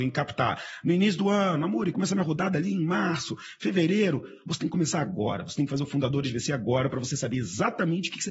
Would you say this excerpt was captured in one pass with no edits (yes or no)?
no